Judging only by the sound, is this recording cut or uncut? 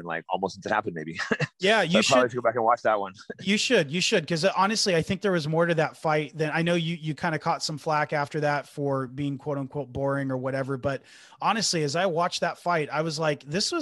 uncut